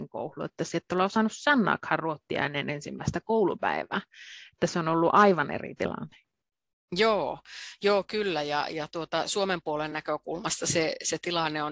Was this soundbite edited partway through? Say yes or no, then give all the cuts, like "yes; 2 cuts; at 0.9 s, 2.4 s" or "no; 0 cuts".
no; 0 cuts